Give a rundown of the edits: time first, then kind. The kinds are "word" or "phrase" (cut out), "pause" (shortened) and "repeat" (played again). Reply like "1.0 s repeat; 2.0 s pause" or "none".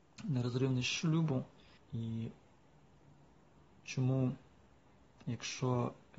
1.8 s word

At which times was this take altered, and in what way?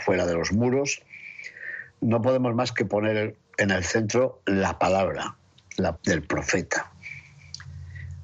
1.9 s pause; 3.5 s pause; 6.0 s word

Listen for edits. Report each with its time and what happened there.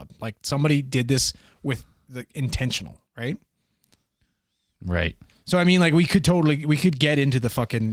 3.1 s pause

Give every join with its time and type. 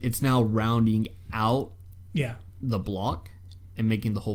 none

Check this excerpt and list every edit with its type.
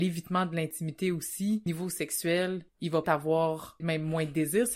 1.7 s word; 3.0 s word; 3.8 s word

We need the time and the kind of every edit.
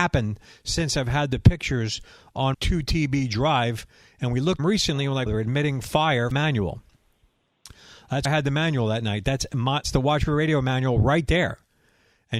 2.5 s word; 4.6 s phrase; 5.3 s word; 6.3 s phrase; 8.2 s word; 9.8 s word

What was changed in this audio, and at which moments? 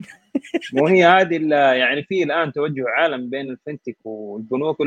none

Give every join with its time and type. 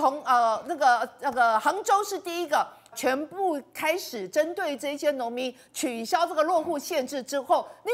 2.9 s word

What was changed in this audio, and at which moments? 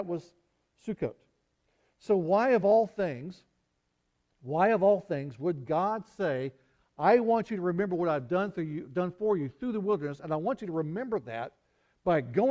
none

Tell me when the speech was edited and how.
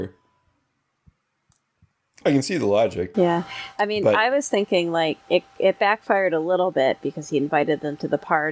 5.2 s pause

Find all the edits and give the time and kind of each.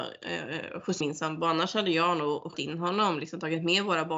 1.0 s word; 2.5 s word

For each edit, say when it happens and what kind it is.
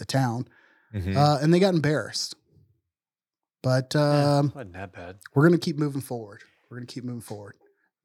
none

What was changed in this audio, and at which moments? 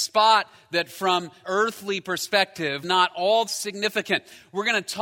1.4 s word; 2.8 s word; 3.5 s word

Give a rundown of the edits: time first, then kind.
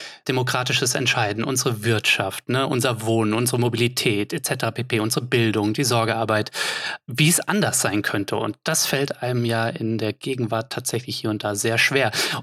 none

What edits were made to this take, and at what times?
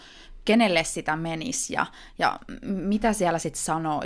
none

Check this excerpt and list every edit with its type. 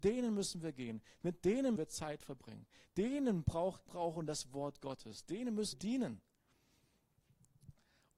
1.8 s word; 3.9 s word; 5.7 s word

